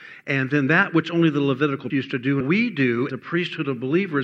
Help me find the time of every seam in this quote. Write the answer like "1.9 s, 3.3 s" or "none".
1.9 s, 2.4 s, 3.1 s